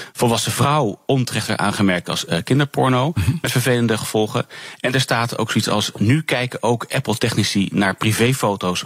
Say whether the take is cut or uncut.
uncut